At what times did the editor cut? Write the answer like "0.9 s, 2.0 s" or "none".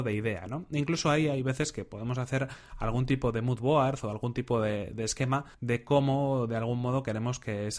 5.5 s

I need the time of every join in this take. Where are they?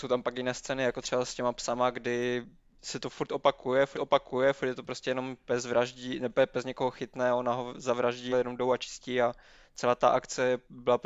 3.9 s, 8.3 s

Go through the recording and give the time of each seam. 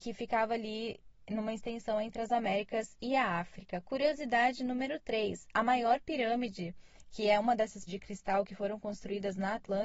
7.9 s

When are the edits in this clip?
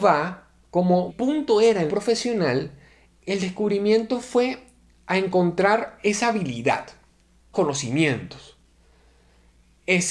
1.1 s, 1.9 s, 7.5 s

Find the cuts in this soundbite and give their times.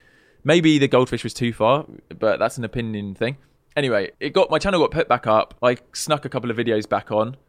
4.1 s, 5.6 s

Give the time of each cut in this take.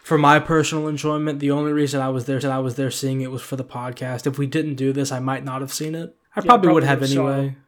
2.4 s, 6.2 s

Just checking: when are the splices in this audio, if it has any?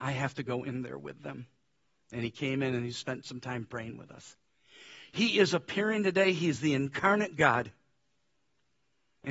none

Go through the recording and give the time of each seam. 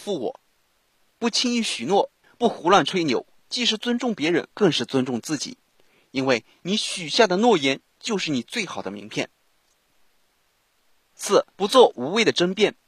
4.5 s, 11.5 s

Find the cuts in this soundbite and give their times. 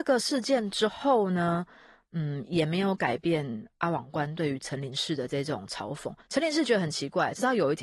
6.2 s

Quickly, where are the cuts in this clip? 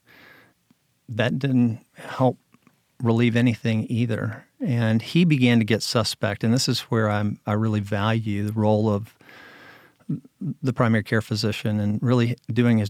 1.9 s

